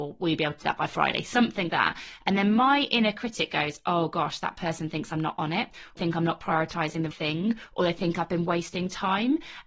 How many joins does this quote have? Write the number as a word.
three